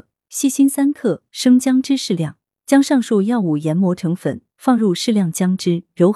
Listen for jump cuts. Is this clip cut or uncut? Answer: uncut